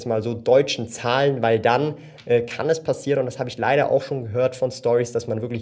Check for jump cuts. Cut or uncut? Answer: uncut